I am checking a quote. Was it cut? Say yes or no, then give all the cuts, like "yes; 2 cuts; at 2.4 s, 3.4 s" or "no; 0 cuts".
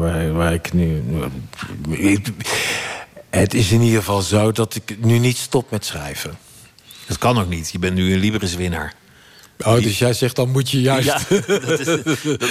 no; 0 cuts